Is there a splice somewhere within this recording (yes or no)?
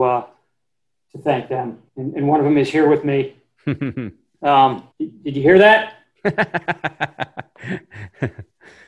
yes